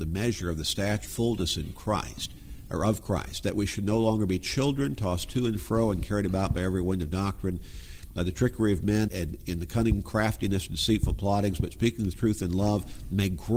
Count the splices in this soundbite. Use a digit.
2